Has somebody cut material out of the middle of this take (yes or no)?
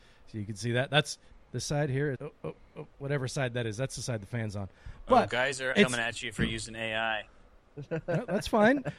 yes